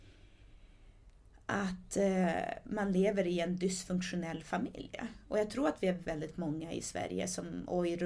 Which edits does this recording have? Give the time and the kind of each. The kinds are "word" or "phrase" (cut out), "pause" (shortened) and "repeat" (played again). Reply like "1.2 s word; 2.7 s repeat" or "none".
6.0 s word